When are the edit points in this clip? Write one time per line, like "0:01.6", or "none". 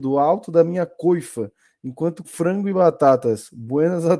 0:02.2